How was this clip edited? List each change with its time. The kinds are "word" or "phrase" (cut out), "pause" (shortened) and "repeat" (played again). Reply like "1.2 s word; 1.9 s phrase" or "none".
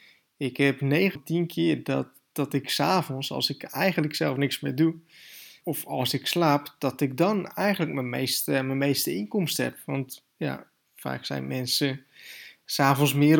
1.2 s word; 5.6 s word